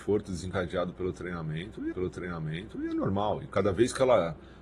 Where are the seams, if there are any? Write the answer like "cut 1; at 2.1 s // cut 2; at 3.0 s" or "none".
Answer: cut 1; at 1.9 s